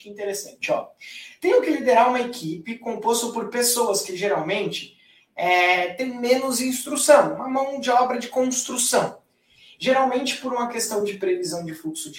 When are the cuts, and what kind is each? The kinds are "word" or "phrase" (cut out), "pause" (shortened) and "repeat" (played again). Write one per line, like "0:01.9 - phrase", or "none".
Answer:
none